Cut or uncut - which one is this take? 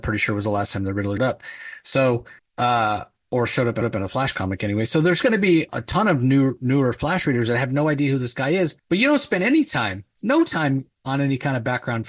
cut